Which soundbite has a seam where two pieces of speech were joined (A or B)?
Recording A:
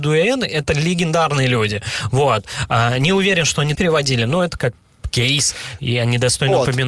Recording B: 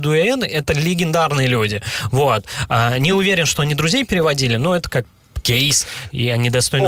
A